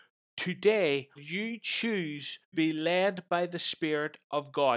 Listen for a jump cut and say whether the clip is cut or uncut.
cut